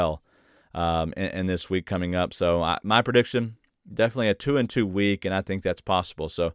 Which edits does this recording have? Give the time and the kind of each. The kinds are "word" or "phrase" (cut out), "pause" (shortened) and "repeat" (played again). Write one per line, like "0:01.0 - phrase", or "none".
none